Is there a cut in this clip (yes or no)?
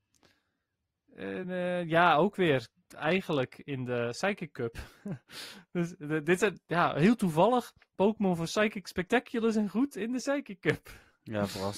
no